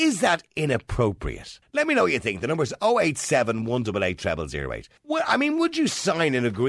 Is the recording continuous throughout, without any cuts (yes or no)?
no